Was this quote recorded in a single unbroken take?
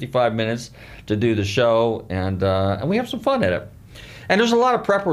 yes; 0 cuts

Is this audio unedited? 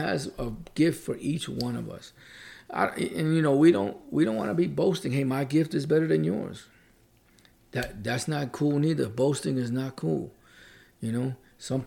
yes; 0 cuts

